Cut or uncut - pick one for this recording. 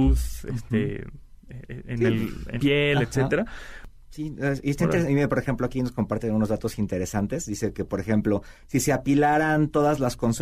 cut